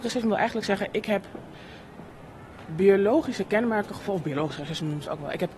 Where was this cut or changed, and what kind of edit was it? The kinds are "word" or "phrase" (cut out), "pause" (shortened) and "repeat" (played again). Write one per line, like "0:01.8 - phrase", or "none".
none

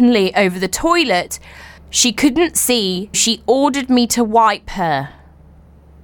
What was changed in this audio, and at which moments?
0:01.8 - pause
0:03.1 - word

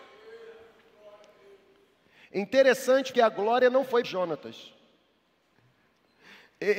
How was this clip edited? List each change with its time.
0:03.1 - word
0:04.0 - word

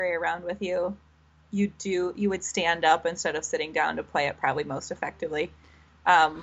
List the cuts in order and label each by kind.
none

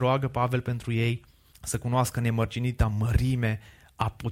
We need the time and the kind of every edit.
0:01.5 - pause

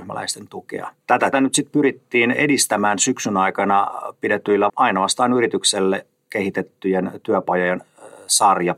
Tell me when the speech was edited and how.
0:01.3 - word
0:04.7 - phrase

